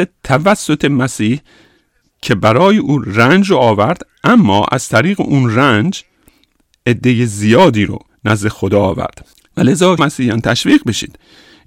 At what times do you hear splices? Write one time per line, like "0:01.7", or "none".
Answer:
0:08.1
0:09.3
0:10.0